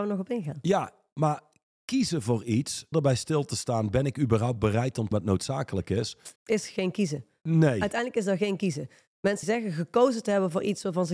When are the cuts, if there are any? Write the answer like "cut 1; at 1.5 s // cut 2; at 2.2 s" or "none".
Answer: cut 1; at 2.9 s // cut 2; at 5.1 s // cut 3; at 6.4 s // cut 4; at 9.4 s

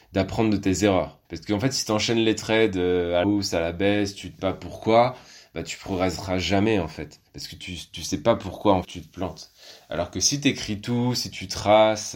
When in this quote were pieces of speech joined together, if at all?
cut 1; at 1.2 s // cut 2; at 3.2 s // cut 3; at 4.4 s // cut 4; at 7.3 s // cut 5; at 8.8 s

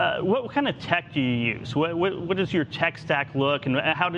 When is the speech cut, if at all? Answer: none

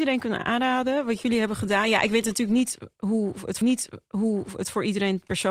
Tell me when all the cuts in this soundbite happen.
cut 1; at 3.6 s

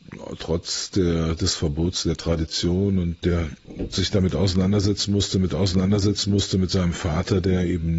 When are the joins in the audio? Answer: cut 1; at 5.5 s

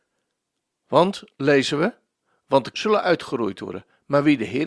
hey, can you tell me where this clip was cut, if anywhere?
cut 1; at 2.7 s

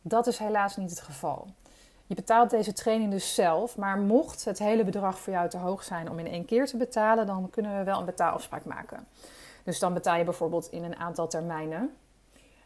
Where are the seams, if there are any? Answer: none

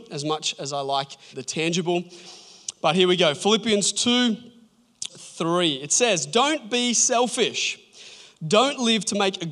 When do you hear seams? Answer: cut 1; at 1.3 s // cut 2; at 5.1 s

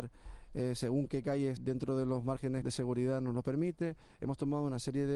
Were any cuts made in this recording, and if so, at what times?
cut 1; at 1.6 s // cut 2; at 2.6 s

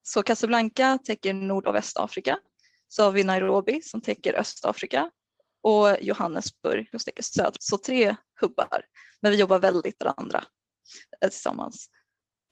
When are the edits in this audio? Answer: cut 1; at 6.9 s // cut 2; at 7.6 s // cut 3; at 9.9 s

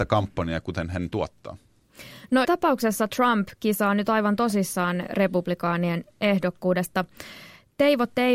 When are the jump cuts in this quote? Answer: cut 1; at 2.4 s

